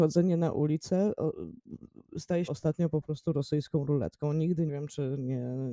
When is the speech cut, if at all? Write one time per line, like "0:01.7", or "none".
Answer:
0:02.5
0:04.7